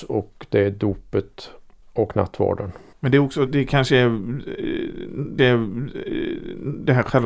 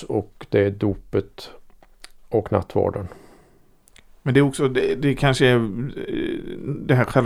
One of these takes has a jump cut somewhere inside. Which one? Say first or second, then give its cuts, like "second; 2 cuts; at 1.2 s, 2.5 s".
first; 4 cuts; at 1.8 s, 2.9 s, 3.5 s, 5.4 s